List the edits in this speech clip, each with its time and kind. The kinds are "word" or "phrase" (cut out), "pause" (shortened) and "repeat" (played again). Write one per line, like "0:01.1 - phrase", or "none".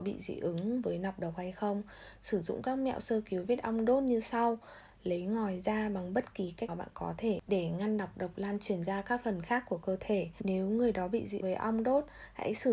0:06.7 - word
0:11.4 - word